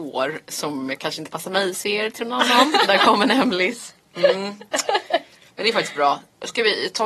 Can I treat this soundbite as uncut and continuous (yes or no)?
yes